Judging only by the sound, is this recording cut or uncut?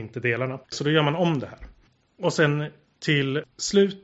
uncut